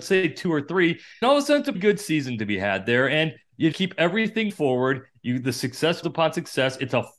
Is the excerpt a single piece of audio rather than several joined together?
no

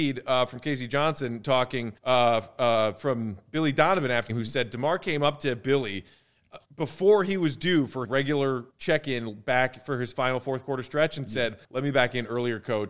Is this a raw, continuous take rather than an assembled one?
no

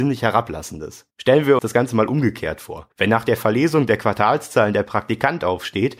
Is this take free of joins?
no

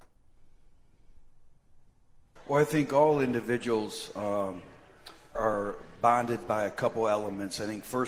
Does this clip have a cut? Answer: yes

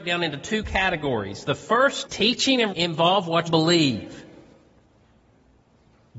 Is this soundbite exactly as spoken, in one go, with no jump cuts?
no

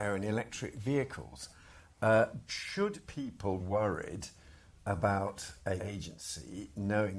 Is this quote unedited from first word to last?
no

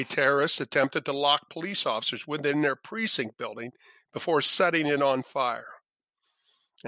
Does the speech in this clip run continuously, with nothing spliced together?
yes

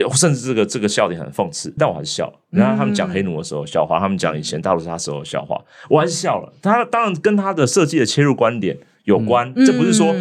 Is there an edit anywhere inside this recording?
yes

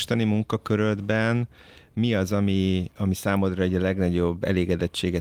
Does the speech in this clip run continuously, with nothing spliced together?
yes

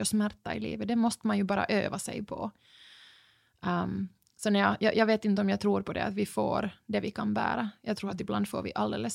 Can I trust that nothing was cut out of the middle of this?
yes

